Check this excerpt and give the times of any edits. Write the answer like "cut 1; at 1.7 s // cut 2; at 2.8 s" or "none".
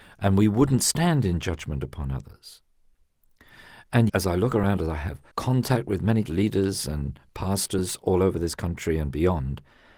cut 1; at 4.1 s // cut 2; at 5.3 s // cut 3; at 6.3 s